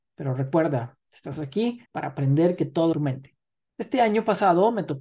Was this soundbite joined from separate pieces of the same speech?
yes; 3 cuts; at 1.9 s, 2.9 s, 3.5 s

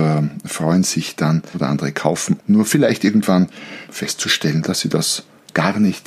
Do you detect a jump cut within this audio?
yes; 3 cuts; at 1.5 s, 2.4 s, 3.9 s

